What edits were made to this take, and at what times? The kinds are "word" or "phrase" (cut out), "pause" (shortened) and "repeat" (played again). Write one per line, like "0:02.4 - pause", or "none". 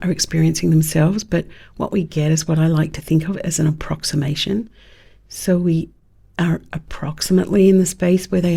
none